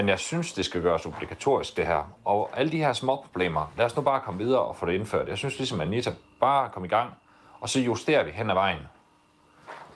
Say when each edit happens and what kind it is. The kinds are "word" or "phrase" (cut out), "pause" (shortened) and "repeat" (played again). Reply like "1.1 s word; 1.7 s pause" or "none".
none

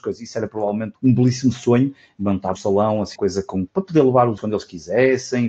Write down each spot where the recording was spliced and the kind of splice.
0.9 s word; 2.5 s word; 3.1 s word; 3.7 s word; 4.4 s word

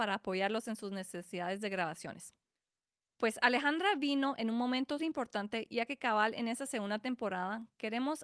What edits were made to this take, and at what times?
5.0 s word

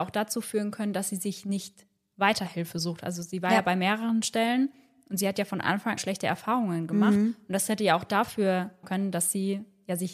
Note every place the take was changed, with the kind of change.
6.0 s phrase; 8.8 s word

